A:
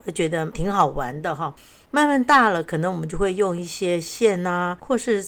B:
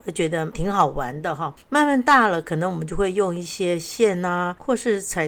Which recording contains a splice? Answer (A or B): B